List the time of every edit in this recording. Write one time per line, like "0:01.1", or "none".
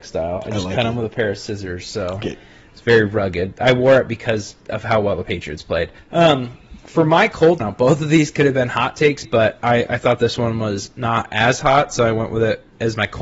0:02.2
0:06.0
0:07.6
0:09.2